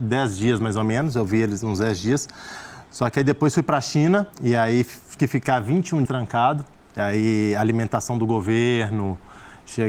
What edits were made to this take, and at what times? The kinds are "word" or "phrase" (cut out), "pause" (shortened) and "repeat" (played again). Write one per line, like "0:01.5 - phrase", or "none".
0:04.3 - pause
0:05.2 - word
0:06.1 - word